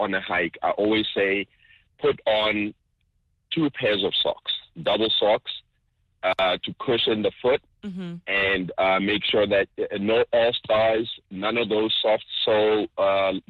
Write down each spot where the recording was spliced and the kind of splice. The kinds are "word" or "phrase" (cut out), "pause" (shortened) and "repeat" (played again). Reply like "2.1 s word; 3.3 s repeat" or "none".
none